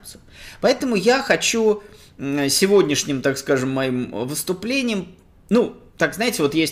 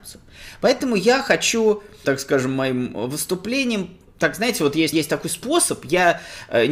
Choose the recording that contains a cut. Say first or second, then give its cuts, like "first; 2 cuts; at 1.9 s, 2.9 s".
second; 3 cuts; at 2.0 s, 4.1 s, 4.9 s